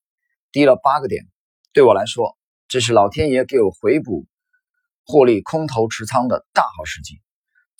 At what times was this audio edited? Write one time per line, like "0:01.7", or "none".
none